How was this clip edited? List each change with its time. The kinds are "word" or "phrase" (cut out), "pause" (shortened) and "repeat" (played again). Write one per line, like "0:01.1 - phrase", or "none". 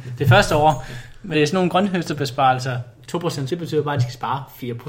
0:01.3 - word
0:03.5 - word